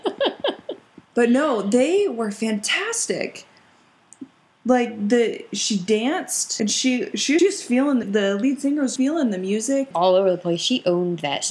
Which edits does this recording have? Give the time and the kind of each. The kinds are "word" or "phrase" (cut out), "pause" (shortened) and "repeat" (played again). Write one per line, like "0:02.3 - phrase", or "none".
0:01.0 - pause
0:06.6 - word
0:07.4 - phrase
0:08.0 - word
0:09.0 - word
0:09.9 - phrase